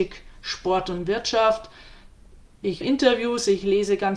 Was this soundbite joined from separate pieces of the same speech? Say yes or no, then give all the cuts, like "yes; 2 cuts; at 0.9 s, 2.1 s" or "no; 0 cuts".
yes; 1 cut; at 2.8 s